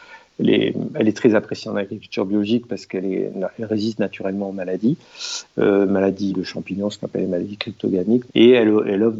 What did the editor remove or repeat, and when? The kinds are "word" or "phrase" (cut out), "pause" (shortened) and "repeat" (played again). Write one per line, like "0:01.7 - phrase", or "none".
0:06.3 - word
0:08.3 - word